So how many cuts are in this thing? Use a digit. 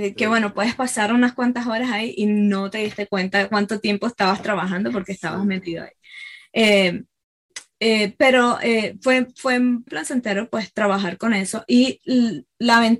1